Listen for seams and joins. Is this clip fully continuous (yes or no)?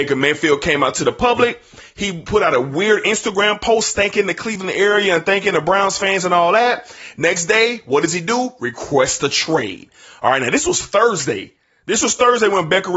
yes